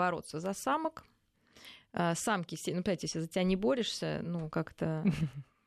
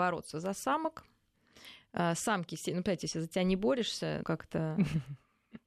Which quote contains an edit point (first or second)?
second